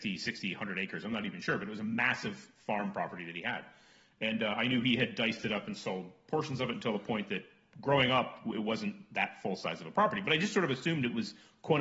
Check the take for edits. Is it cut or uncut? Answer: uncut